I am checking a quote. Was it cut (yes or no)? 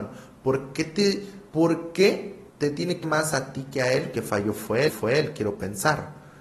yes